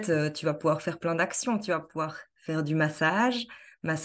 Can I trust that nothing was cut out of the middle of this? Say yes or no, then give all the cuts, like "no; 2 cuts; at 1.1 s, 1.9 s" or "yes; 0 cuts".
yes; 0 cuts